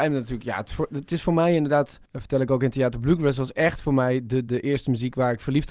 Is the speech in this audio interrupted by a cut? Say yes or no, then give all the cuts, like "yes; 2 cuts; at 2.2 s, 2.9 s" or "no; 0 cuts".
yes; 2 cuts; at 2.1 s, 4.5 s